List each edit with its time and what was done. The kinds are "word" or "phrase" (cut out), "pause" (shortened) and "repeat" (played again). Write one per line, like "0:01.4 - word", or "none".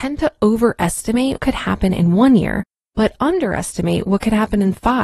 0:01.4 - word